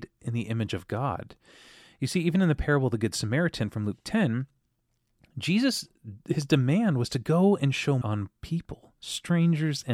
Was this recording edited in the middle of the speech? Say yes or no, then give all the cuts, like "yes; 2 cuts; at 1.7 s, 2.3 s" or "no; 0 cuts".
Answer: yes; 3 cuts; at 6.2 s, 8.0 s, 8.4 s